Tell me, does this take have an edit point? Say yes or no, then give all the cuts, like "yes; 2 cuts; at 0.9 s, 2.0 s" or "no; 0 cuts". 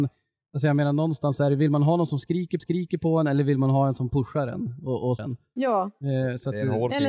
yes; 2 cuts; at 2.6 s, 5.2 s